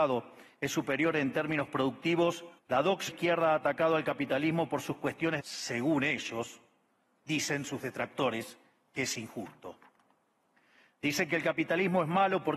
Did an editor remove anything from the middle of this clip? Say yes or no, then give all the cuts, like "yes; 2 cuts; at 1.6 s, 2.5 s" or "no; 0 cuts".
yes; 3 cuts; at 2.6 s, 3.1 s, 5.4 s